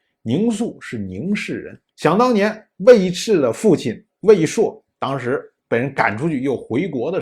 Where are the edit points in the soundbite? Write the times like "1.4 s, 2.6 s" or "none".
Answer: 1.9 s